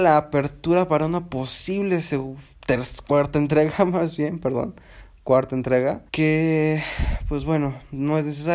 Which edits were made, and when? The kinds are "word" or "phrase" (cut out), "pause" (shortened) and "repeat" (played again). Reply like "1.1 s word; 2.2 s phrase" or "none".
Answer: 6.1 s pause

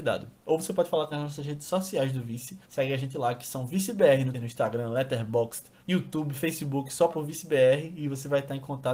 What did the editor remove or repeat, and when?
1.1 s phrase; 2.6 s pause; 4.3 s word; 5.8 s pause; 7.1 s word

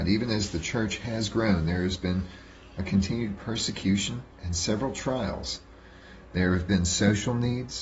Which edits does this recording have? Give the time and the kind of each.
4.3 s pause

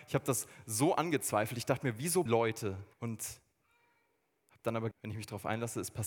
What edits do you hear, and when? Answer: 2.3 s word; 2.9 s pause; 4.9 s word

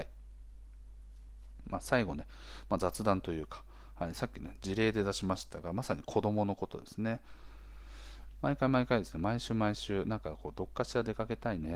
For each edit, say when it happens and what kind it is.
none

